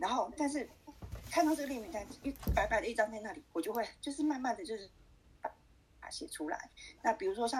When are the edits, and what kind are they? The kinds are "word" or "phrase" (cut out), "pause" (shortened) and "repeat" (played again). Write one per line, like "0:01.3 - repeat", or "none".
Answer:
none